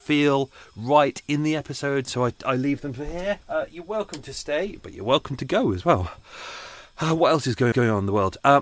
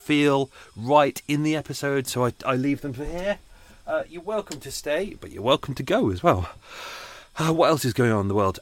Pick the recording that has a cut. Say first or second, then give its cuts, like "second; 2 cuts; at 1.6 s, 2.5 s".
first; 2 cuts; at 3.4 s, 7.7 s